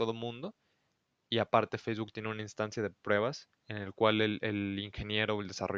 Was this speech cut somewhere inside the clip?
no; 0 cuts

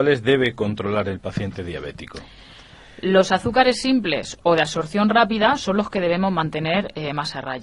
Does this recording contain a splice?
no; 0 cuts

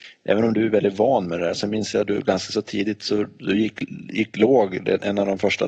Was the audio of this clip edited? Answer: no; 0 cuts

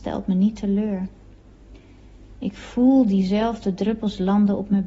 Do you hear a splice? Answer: no; 0 cuts

